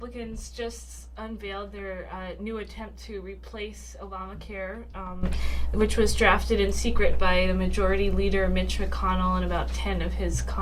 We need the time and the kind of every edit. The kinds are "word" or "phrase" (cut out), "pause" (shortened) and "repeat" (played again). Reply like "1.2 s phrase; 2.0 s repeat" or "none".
none

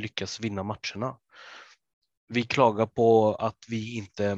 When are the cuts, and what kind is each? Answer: none

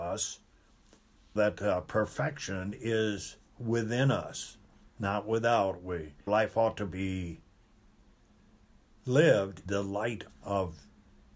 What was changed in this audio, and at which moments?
1.4 s word; 6.3 s word; 9.7 s word; 10.3 s word

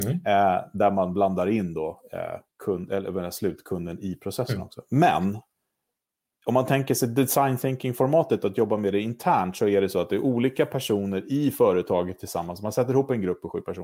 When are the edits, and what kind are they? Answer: 2.5 s pause

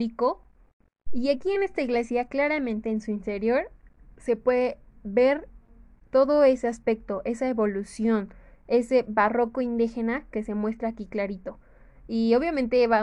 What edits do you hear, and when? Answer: none

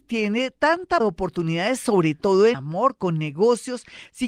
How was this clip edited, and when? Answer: 1.0 s word; 2.5 s word

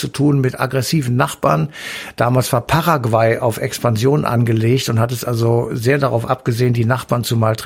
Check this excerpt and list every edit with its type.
none

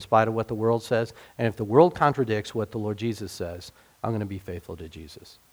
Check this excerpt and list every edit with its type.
none

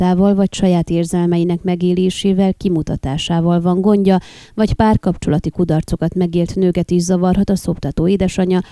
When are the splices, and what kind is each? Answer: none

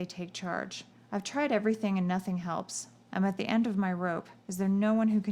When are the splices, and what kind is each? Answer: 0.9 s pause; 4.4 s pause

